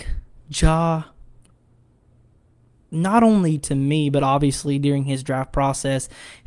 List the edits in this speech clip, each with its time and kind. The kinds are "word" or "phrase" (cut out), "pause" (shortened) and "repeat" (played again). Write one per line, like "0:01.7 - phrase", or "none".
none